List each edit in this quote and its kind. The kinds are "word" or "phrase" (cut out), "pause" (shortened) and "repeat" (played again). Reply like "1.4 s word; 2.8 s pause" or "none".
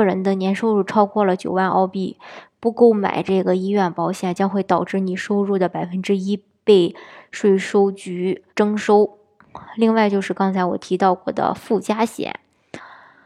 8.5 s pause